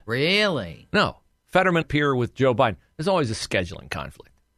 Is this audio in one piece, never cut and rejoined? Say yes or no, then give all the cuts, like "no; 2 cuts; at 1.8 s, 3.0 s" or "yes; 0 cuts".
no; 1 cut; at 1.8 s